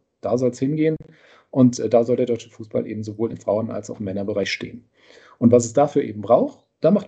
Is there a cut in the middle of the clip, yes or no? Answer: no